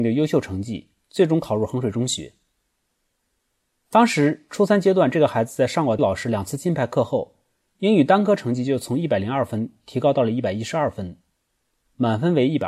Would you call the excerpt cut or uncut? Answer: cut